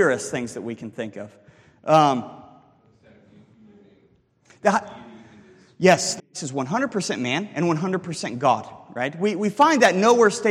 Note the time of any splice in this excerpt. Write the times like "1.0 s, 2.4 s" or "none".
6.2 s